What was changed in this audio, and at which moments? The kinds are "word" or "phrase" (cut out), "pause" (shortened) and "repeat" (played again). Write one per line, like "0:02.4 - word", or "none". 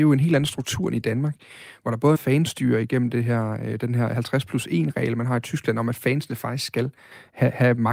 0:02.1 - phrase